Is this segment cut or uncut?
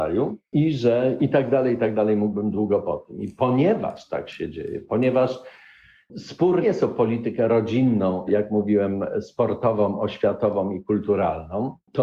cut